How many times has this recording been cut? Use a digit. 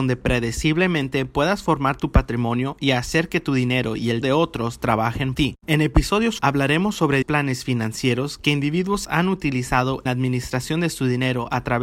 6